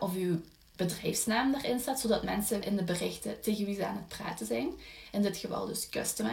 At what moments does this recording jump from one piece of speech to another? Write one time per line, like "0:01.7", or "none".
0:02.6